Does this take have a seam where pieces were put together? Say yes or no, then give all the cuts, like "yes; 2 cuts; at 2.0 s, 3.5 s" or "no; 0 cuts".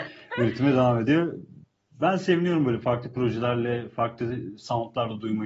no; 0 cuts